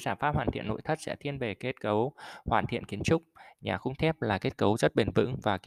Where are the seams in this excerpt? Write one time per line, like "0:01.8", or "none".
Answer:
none